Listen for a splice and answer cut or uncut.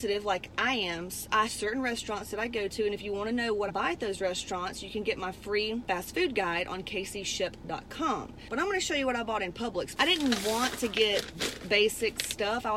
cut